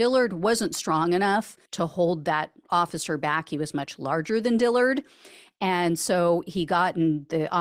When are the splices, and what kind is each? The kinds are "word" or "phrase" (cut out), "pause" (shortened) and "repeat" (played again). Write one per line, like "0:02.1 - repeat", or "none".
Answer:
0:01.7 - pause